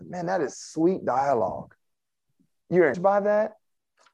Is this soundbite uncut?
no; 1 cut; at 2.9 s

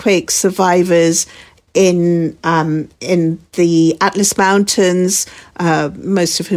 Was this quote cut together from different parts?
no; 0 cuts

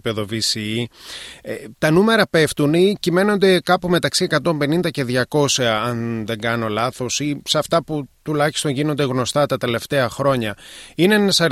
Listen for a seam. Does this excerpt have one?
no; 0 cuts

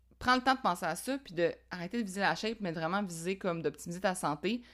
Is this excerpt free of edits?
yes; 0 cuts

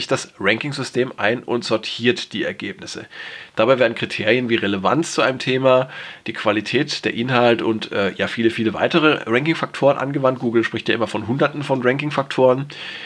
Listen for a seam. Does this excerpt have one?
no; 0 cuts

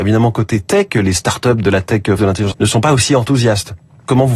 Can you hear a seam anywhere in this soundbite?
yes; 3 cuts; at 1.6 s, 2.2 s, 2.5 s

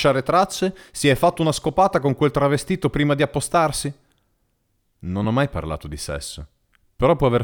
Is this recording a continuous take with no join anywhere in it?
yes; 0 cuts

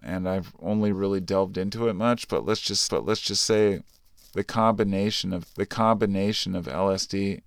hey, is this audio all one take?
no; 3 cuts; at 0.9 s, 2.9 s, 5.4 s

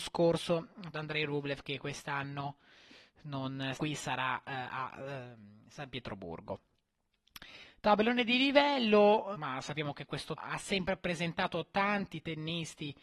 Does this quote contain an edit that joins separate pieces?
yes; 4 cuts; at 0.9 s, 3.7 s, 9.3 s, 10.4 s

